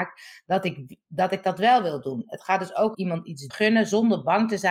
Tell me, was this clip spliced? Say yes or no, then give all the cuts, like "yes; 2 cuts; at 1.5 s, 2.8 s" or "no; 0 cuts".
yes; 2 cuts; at 2.9 s, 3.5 s